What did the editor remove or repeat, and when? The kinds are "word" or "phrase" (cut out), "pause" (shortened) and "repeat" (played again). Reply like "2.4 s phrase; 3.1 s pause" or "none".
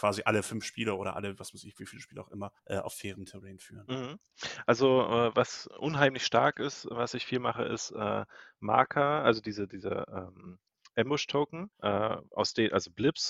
2.6 s pause; 11.7 s pause